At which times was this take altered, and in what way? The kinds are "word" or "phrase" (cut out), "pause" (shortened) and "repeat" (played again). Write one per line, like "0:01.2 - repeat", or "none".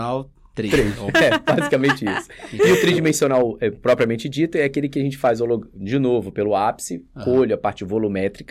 none